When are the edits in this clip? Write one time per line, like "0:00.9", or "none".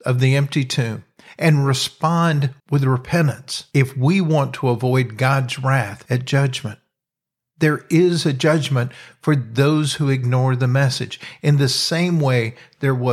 0:02.6